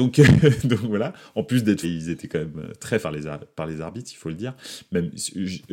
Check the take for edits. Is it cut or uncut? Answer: cut